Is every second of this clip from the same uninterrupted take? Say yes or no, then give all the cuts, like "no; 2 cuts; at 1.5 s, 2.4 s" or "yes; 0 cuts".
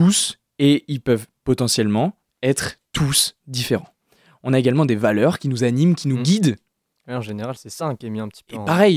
yes; 0 cuts